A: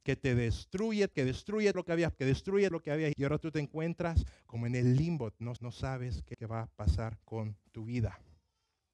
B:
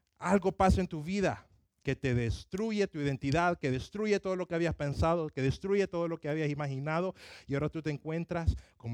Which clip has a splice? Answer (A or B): A